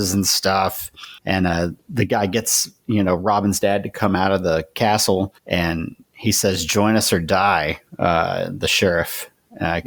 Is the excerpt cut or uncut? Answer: cut